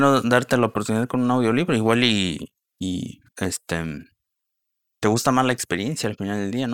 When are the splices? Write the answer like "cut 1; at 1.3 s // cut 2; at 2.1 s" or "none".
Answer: cut 1; at 3.3 s